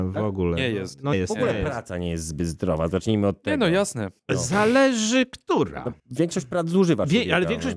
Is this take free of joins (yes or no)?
no